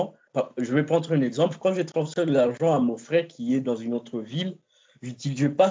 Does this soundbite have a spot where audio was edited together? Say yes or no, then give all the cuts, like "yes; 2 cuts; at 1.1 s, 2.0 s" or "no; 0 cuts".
no; 0 cuts